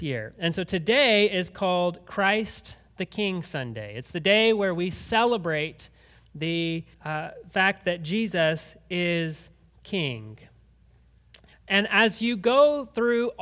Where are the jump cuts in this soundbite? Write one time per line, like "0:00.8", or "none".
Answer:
0:06.9
0:11.5